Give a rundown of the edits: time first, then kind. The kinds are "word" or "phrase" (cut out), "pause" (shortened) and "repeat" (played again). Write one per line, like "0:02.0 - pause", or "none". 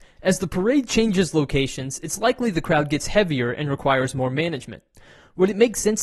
none